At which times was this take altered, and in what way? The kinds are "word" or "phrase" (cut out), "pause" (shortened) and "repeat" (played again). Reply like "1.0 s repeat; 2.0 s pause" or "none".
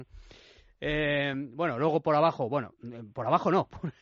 none